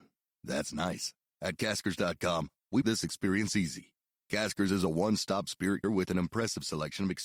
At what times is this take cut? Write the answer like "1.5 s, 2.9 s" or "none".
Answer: 2.8 s, 5.8 s